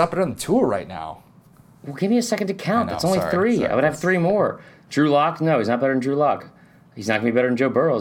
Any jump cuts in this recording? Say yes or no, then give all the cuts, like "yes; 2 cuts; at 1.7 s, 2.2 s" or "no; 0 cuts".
no; 0 cuts